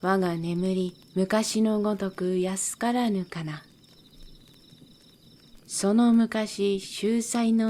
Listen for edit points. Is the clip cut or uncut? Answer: cut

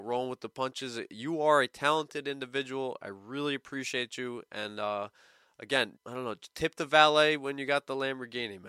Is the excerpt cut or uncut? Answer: cut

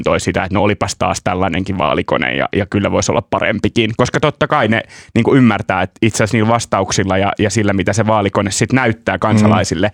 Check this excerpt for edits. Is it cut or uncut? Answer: uncut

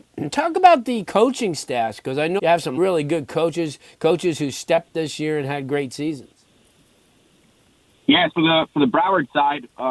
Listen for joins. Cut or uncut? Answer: cut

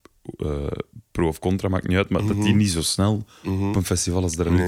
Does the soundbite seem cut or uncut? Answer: uncut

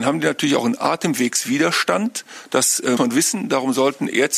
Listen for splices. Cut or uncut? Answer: cut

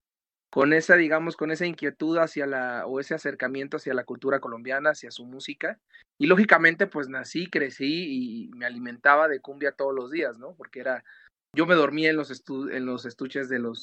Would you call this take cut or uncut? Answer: uncut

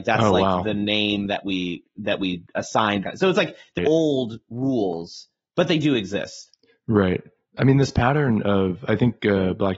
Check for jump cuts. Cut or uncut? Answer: cut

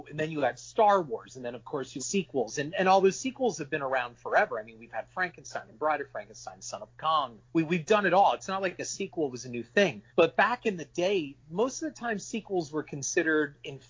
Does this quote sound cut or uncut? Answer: cut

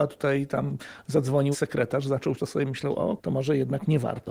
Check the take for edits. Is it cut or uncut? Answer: cut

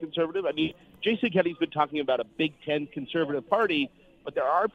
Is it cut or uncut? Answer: uncut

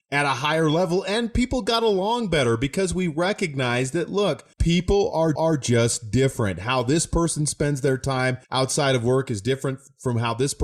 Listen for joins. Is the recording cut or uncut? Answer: cut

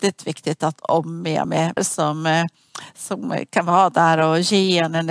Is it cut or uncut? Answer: cut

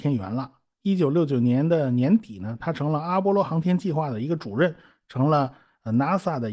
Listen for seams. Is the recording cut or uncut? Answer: uncut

